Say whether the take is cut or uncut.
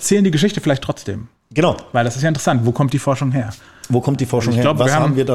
uncut